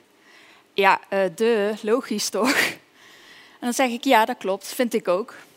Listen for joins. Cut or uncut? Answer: uncut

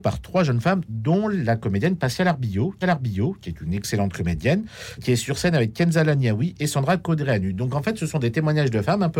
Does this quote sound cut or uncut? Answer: cut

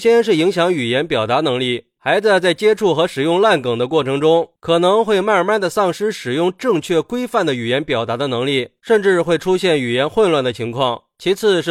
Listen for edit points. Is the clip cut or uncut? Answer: uncut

